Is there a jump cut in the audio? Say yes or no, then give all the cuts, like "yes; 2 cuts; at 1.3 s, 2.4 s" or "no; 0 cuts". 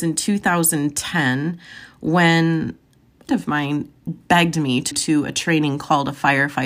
yes; 3 cuts; at 3.3 s, 4.1 s, 4.9 s